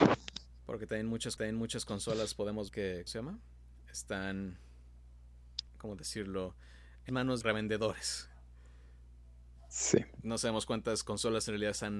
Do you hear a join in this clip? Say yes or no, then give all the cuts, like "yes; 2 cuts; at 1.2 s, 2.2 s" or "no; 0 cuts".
yes; 6 cuts; at 1.4 s, 2.7 s, 3.1 s, 5.7 s, 7.1 s, 7.4 s